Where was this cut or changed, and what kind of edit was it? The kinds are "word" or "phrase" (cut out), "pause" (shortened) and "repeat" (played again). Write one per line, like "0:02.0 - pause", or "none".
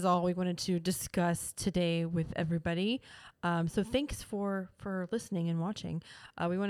none